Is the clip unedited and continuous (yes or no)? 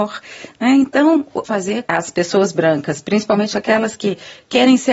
no